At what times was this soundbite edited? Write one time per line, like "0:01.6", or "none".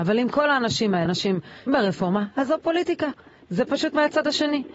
0:01.1
0:01.7